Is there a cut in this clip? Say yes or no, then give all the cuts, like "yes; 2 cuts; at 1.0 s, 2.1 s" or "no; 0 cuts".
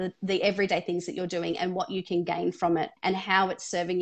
yes; 1 cut; at 3.0 s